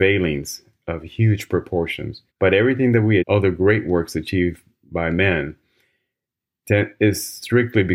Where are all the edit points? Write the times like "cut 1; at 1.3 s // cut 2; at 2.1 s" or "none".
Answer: cut 1; at 2.3 s // cut 2; at 3.2 s